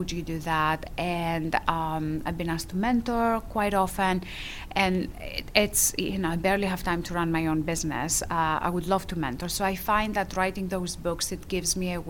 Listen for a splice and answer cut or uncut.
uncut